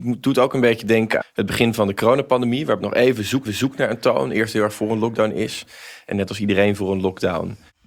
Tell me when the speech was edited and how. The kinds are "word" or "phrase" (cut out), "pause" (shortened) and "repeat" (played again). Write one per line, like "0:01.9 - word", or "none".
0:01.2 - word
0:02.8 - word
0:03.4 - repeat